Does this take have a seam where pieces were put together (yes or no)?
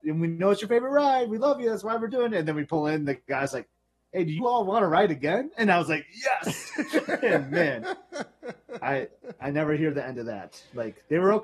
no